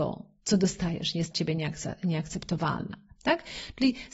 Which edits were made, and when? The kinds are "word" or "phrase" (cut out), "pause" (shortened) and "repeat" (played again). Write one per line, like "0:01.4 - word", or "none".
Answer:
0:01.3 - word